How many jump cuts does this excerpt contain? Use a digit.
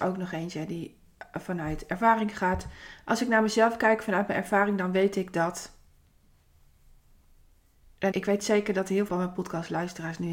2